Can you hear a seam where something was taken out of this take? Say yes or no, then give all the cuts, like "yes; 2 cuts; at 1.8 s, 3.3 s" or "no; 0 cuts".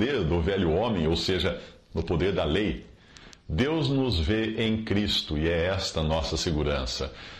no; 0 cuts